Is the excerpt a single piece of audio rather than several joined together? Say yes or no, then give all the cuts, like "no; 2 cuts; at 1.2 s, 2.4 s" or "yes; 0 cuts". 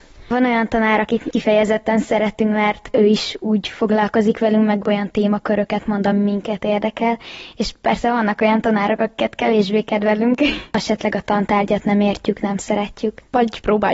yes; 0 cuts